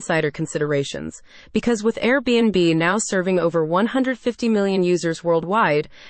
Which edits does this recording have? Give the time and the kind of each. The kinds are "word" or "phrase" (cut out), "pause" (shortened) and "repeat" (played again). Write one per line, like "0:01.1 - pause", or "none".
none